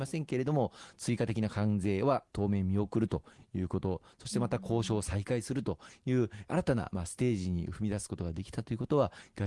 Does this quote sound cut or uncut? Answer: uncut